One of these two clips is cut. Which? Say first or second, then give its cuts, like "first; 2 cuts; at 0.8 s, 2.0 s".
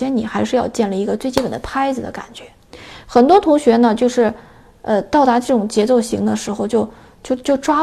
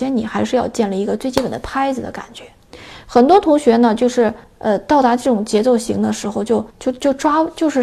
second; 2 cuts; at 4.4 s, 6.7 s